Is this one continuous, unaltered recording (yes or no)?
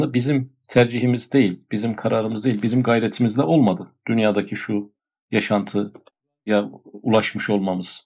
yes